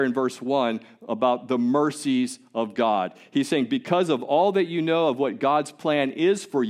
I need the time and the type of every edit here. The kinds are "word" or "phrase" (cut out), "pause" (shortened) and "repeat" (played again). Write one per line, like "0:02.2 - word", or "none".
none